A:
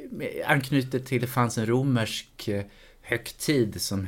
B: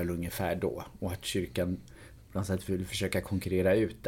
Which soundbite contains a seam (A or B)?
A